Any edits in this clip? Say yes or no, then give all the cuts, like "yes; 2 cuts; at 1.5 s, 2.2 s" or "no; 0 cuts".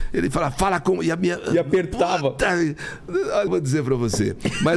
yes; 1 cut; at 3.5 s